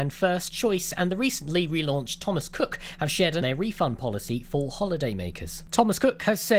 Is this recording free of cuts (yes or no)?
no